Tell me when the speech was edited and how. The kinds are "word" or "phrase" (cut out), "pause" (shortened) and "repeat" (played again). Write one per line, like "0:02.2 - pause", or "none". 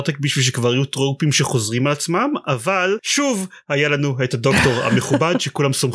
none